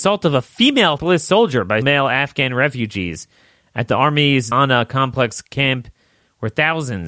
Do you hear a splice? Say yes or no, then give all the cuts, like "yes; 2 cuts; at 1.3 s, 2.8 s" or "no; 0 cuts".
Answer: yes; 3 cuts; at 1.0 s, 1.8 s, 4.5 s